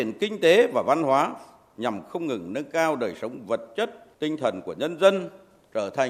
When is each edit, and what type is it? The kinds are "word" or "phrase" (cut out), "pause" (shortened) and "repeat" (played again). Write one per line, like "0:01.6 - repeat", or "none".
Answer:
0:04.1 - pause